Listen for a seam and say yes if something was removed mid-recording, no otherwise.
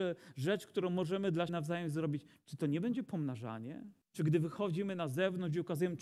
yes